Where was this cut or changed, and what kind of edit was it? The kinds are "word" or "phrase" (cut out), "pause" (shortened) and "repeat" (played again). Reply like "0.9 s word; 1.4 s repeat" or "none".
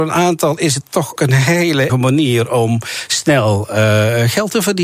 1.2 s word; 1.9 s word